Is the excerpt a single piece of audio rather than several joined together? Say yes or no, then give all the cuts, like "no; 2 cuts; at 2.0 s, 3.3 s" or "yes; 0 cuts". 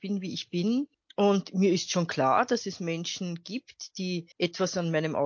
no; 2 cuts; at 0.9 s, 4.3 s